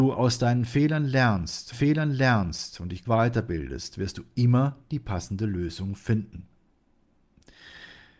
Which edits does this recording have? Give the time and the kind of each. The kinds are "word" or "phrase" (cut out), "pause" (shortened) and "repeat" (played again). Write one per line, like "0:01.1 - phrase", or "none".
0:01.7 - repeat
0:03.0 - word